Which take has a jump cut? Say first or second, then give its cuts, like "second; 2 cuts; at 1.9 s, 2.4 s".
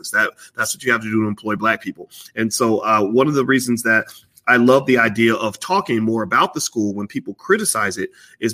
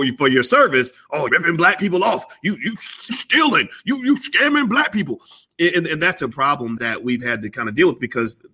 second; 4 cuts; at 1.3 s, 3.1 s, 6.3 s, 6.8 s